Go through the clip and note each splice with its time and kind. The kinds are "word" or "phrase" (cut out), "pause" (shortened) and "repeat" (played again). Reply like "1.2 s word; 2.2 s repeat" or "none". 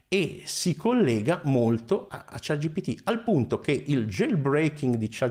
none